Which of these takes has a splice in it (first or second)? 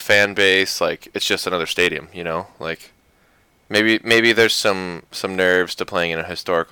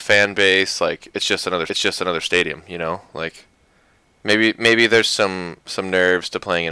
second